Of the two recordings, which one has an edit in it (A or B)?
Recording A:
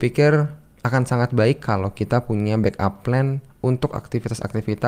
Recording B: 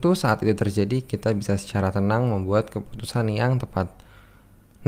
A